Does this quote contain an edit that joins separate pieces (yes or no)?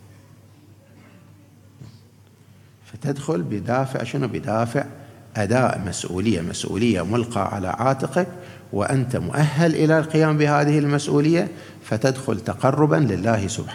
no